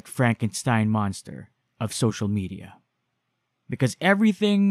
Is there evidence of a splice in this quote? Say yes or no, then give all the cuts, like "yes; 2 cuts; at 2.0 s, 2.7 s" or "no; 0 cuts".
yes; 1 cut; at 1.6 s